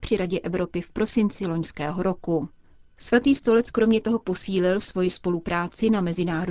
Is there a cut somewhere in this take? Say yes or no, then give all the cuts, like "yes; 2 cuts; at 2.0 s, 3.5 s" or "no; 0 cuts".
no; 0 cuts